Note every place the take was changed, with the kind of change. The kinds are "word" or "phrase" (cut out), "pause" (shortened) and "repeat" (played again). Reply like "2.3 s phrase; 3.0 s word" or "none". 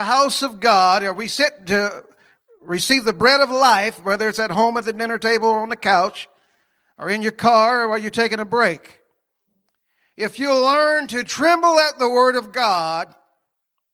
none